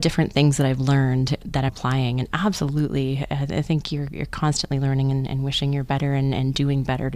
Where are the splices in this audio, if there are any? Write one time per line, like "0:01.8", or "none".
0:01.7